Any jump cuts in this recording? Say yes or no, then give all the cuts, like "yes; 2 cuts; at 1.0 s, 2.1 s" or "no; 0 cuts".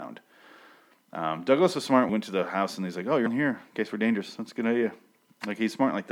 yes; 2 cuts; at 2.1 s, 3.3 s